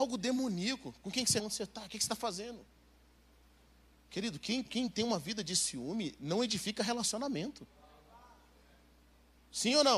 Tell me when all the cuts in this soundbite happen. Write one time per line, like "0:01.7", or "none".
0:01.4
0:04.7